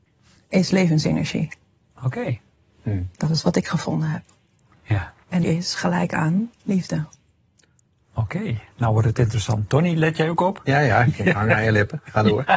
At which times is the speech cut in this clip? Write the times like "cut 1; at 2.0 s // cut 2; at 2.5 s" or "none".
cut 1; at 3.1 s // cut 2; at 5.4 s // cut 3; at 6.5 s